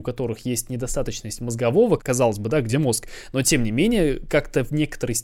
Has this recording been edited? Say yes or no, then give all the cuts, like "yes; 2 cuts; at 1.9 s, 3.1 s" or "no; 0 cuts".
yes; 2 cuts; at 2.0 s, 2.7 s